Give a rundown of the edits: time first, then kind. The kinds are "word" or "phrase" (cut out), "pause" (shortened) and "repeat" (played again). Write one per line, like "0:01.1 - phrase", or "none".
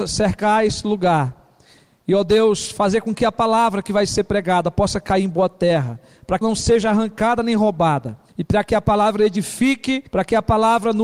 0:06.4 - word
0:08.3 - pause
0:10.1 - pause